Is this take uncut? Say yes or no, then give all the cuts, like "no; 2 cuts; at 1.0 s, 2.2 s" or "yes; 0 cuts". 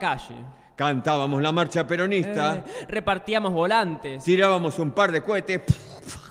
yes; 0 cuts